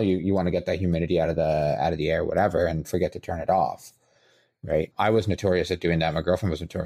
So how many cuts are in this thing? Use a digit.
1